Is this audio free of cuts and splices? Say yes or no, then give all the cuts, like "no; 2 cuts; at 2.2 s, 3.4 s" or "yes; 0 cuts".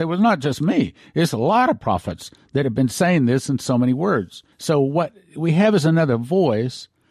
no; 1 cut; at 4.5 s